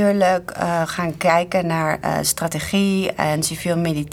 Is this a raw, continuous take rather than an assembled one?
yes; 0 cuts

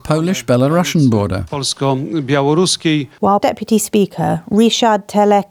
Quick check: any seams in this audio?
yes; 1 cut; at 3.4 s

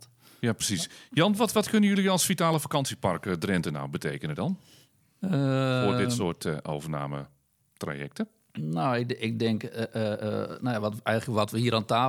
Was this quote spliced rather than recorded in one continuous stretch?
no; 0 cuts

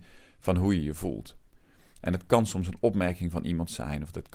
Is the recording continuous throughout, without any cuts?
yes; 0 cuts

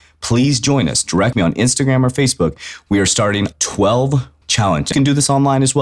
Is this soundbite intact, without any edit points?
no; 4 cuts; at 1.3 s, 3.5 s, 4.4 s, 4.9 s

